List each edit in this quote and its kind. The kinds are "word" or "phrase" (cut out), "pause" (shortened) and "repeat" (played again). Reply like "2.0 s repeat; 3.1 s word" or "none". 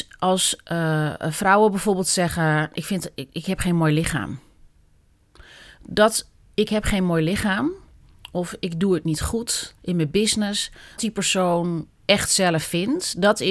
9.8 s pause; 11.0 s phrase